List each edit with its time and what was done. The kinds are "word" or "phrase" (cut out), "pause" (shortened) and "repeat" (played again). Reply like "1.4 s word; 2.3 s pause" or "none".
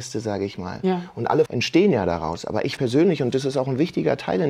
1.5 s phrase; 2.8 s word